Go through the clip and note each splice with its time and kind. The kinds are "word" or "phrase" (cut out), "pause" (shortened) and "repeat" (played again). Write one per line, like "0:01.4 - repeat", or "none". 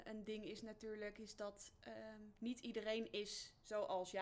none